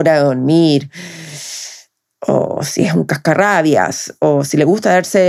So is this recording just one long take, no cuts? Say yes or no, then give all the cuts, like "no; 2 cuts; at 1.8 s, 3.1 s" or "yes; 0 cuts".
yes; 0 cuts